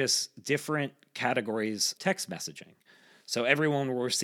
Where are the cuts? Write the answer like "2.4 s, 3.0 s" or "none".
2.0 s